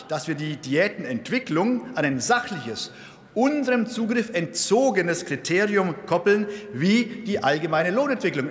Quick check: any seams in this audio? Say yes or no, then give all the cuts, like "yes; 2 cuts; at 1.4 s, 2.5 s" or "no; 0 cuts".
no; 0 cuts